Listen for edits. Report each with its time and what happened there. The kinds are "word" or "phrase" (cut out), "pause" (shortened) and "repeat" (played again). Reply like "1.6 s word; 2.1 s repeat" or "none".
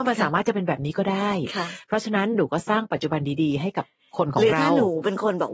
none